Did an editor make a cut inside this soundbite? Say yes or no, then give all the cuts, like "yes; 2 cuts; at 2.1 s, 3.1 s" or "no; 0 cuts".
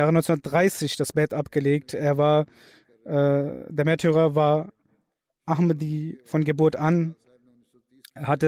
no; 0 cuts